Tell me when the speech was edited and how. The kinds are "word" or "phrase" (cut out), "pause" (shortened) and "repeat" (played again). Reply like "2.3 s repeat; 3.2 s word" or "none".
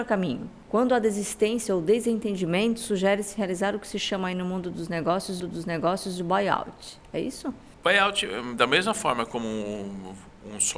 5.4 s repeat